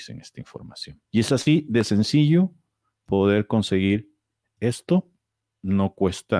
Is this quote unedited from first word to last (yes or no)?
no